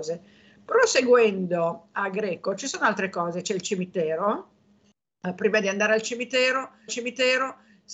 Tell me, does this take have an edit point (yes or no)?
yes